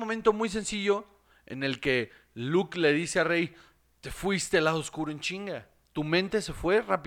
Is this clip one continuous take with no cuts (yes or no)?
yes